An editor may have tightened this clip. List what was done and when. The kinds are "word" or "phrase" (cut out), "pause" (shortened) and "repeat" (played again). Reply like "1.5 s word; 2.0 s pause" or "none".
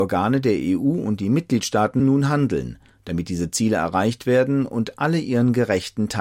2.0 s word